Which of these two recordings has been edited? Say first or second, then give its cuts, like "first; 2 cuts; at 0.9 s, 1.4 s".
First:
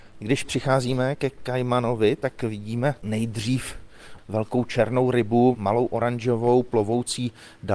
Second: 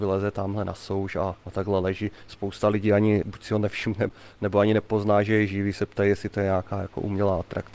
second; 1 cut; at 1.4 s